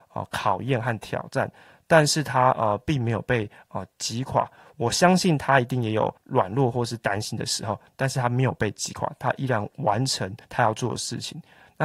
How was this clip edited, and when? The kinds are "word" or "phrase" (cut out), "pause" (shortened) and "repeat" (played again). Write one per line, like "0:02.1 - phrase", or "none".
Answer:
0:06.2 - pause
0:10.4 - pause